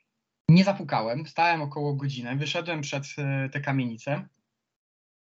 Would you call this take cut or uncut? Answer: uncut